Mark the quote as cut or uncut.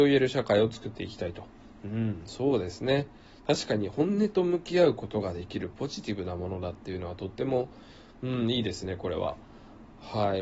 uncut